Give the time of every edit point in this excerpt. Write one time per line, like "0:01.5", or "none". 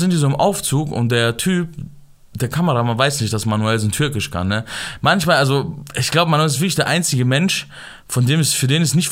none